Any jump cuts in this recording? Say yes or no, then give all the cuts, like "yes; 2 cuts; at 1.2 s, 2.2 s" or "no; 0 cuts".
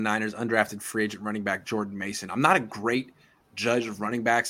no; 0 cuts